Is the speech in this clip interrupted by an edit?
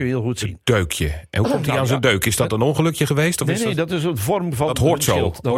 no; 0 cuts

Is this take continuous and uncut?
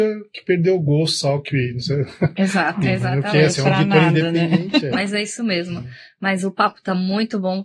no; 1 cut; at 2.8 s

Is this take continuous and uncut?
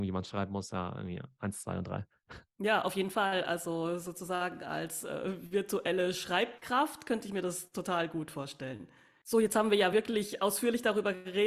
yes; 0 cuts

